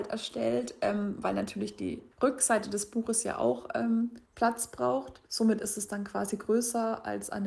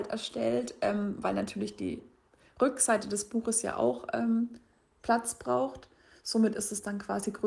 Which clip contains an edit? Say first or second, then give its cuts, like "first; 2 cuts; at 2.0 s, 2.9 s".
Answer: first; 3 cuts; at 2.1 s, 4.2 s, 5.3 s